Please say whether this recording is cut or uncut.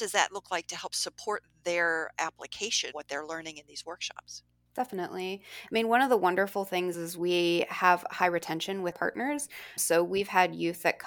cut